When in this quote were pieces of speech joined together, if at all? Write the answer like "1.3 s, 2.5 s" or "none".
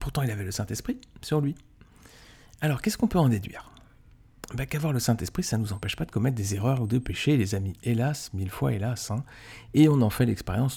none

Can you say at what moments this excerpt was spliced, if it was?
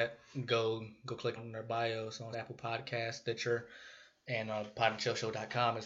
1.4 s, 2.3 s

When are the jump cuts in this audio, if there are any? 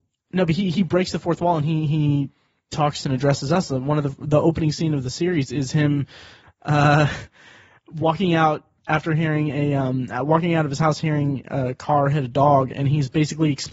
3.0 s

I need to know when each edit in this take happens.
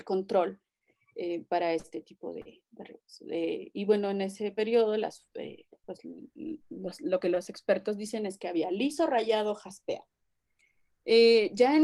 none

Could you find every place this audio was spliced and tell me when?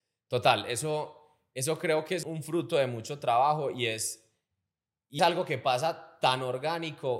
2.2 s, 5.2 s

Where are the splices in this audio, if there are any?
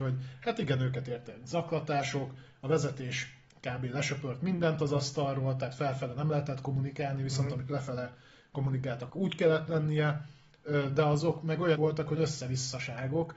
9.1 s, 11.8 s, 12.2 s

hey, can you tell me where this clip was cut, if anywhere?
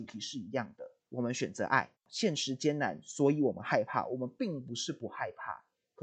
1.0 s, 2.0 s

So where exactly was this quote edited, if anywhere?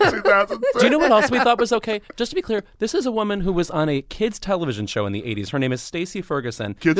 none

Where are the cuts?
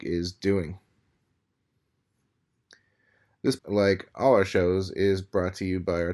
3.6 s

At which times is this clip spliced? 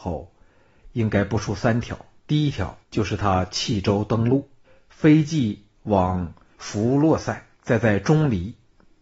2.2 s, 2.8 s, 4.6 s, 5.7 s, 6.5 s, 7.5 s

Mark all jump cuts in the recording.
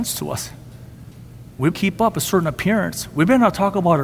1.7 s

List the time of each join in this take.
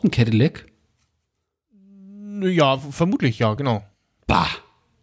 none

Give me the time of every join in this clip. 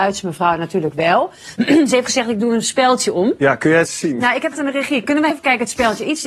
3.9 s, 4.5 s, 5.3 s

